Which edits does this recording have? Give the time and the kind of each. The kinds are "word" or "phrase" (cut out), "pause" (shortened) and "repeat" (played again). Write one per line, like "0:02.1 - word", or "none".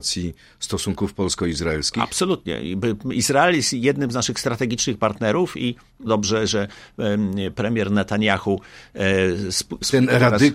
0:06.1 - phrase
0:07.5 - word